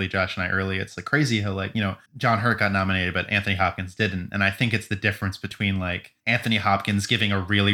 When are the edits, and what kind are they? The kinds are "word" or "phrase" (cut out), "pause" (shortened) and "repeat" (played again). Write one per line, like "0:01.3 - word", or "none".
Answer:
0:02.1 - pause
0:06.2 - pause